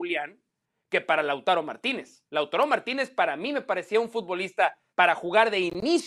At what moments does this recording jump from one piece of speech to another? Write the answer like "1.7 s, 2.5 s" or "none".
2.3 s, 4.9 s